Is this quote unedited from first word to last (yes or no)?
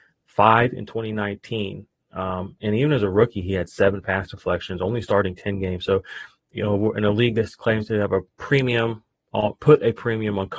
yes